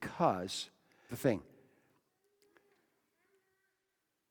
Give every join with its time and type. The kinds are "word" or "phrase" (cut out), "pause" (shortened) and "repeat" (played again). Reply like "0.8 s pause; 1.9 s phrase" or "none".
1.1 s phrase